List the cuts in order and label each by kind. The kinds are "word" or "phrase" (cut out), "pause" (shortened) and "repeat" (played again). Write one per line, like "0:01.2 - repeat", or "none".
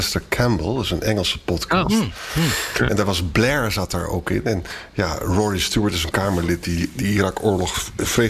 0:06.1 - word